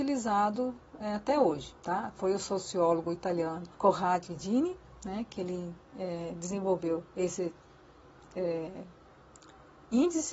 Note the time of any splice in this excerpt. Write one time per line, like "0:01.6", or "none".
0:03.7
0:07.1